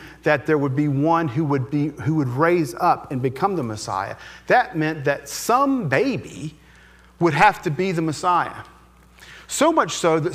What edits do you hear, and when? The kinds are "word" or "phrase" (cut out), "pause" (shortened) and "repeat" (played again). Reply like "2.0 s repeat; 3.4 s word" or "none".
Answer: none

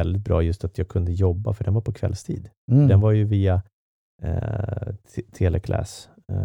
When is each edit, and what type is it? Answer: 2.6 s pause

